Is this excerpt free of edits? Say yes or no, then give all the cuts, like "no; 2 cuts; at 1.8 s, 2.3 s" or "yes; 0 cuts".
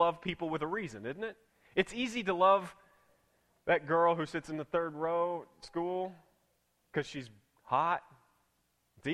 yes; 0 cuts